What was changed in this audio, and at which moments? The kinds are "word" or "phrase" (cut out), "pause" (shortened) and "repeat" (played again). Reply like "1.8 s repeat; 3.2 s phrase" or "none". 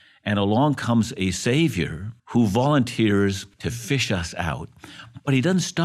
2.2 s pause; 3.5 s pause